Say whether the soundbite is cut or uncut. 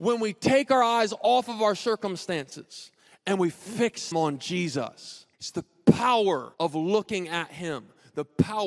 cut